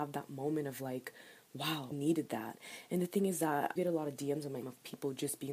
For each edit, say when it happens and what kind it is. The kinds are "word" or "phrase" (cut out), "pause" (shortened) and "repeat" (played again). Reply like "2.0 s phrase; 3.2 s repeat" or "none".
1.9 s word; 3.8 s phrase; 4.6 s word